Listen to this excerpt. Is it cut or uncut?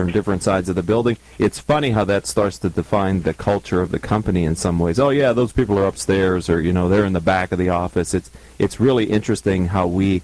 uncut